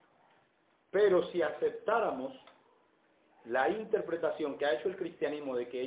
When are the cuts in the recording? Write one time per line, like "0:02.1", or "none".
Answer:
none